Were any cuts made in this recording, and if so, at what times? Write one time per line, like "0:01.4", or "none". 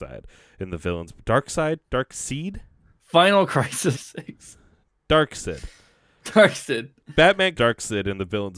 0:03.9
0:07.5